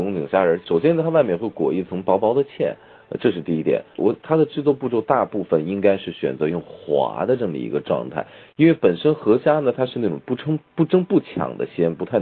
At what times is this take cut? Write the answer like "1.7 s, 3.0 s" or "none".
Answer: 4.0 s